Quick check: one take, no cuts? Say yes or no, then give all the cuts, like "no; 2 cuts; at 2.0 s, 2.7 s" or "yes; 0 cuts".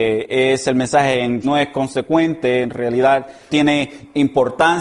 no; 2 cuts; at 1.4 s, 3.5 s